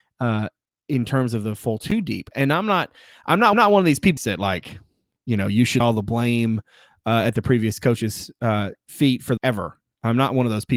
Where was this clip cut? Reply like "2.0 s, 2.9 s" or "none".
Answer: 3.5 s, 4.2 s, 5.8 s, 9.4 s